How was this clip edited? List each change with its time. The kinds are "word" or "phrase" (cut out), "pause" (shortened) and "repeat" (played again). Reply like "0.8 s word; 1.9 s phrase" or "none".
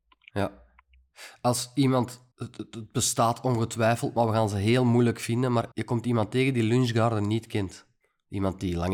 2.3 s pause; 5.7 s pause; 8.0 s pause